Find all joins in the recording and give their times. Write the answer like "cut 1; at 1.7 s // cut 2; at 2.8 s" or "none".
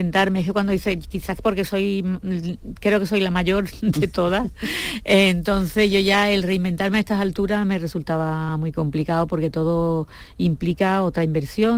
none